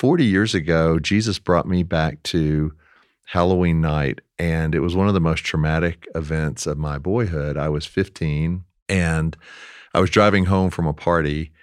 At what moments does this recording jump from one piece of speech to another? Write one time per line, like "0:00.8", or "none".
none